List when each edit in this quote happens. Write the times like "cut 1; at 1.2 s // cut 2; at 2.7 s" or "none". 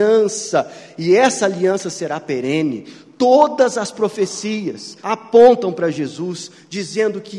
cut 1; at 5.0 s

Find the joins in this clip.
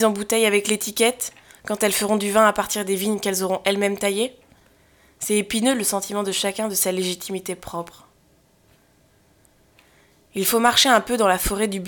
none

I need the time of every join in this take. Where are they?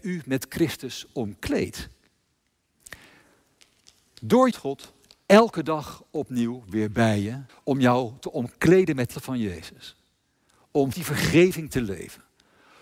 cut 1; at 4.5 s // cut 2; at 7.5 s // cut 3; at 9.1 s // cut 4; at 10.9 s

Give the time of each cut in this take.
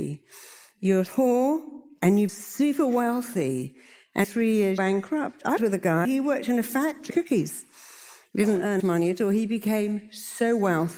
cut 1; at 2.3 s // cut 2; at 4.2 s // cut 3; at 4.8 s // cut 4; at 5.6 s // cut 5; at 6.0 s // cut 6; at 7.1 s // cut 7; at 8.8 s

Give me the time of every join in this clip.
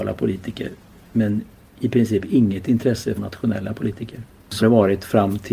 cut 1; at 3.2 s // cut 2; at 4.6 s

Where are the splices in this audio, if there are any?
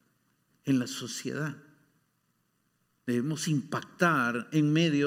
none

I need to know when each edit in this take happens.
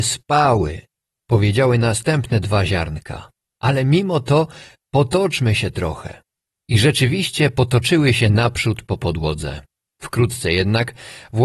none

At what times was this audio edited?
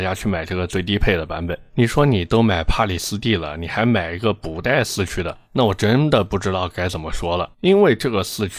cut 1; at 1.7 s // cut 2; at 5.4 s // cut 3; at 7.5 s

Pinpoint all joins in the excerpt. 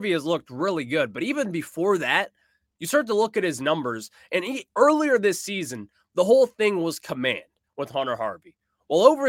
none

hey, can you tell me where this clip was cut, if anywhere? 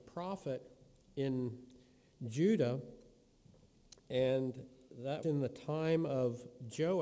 cut 1; at 5.2 s

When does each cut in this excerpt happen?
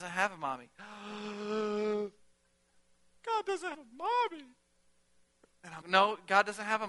cut 1; at 3.7 s // cut 2; at 5.8 s

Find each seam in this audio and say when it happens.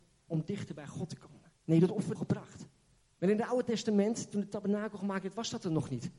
cut 1; at 1.6 s // cut 2; at 2.1 s // cut 3; at 3.0 s

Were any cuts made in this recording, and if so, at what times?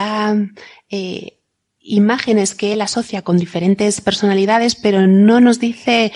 none

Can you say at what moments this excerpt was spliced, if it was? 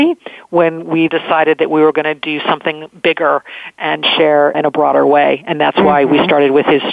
cut 1; at 1.1 s // cut 2; at 4.5 s

